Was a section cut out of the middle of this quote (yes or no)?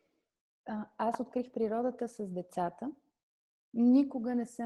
no